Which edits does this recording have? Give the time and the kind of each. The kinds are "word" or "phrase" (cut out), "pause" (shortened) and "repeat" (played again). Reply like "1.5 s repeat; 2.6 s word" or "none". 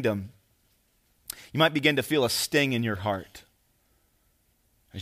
none